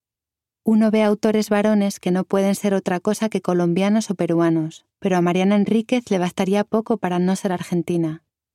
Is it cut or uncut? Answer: cut